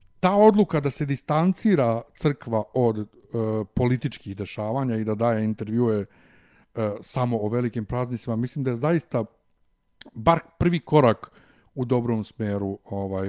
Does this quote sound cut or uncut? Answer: uncut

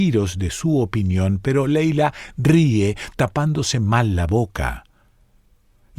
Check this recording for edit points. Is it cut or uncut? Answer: uncut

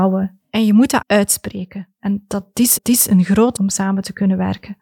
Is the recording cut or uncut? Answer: cut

